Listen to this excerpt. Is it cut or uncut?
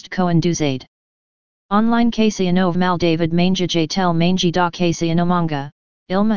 cut